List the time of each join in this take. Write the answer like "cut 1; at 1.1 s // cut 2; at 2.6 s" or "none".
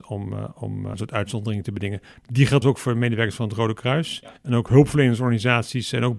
cut 1; at 0.9 s // cut 2; at 2.6 s // cut 3; at 4.4 s